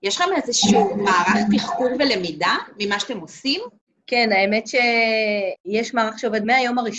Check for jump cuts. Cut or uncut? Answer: cut